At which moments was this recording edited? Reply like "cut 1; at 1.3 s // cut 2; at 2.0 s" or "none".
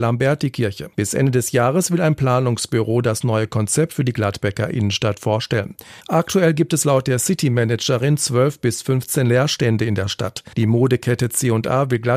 cut 1; at 0.9 s // cut 2; at 6.0 s // cut 3; at 10.5 s